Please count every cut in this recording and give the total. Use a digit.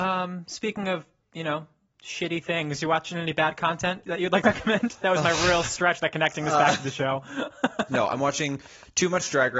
2